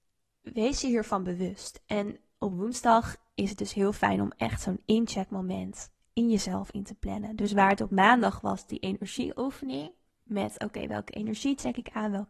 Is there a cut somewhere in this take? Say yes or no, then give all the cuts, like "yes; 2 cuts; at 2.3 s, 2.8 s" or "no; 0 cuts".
no; 0 cuts